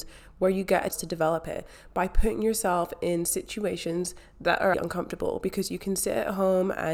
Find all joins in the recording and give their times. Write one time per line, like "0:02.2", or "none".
0:00.9
0:04.7